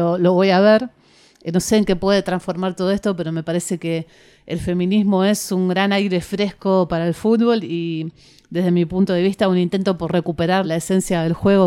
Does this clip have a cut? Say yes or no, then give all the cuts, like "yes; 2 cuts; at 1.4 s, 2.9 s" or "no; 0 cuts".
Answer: yes; 1 cut; at 10.6 s